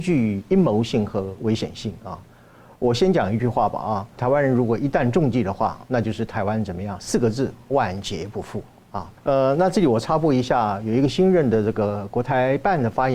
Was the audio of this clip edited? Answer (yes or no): yes